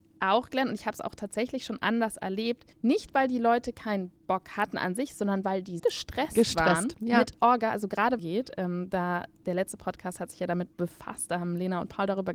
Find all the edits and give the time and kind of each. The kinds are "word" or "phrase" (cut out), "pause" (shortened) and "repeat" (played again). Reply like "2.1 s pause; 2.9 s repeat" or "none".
2.7 s pause; 4.2 s pause; 5.8 s word; 8.2 s phrase; 10.7 s pause